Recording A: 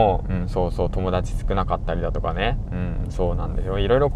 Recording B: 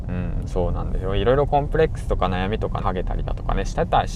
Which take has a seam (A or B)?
B